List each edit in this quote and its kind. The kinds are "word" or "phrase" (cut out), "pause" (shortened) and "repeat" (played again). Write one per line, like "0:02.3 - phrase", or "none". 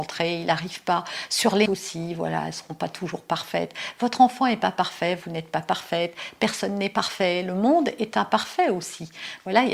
0:01.7 - word